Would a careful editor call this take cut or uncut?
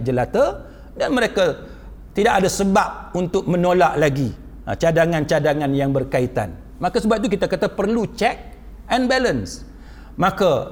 uncut